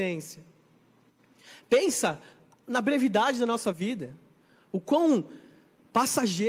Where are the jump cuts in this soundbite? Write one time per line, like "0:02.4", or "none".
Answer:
none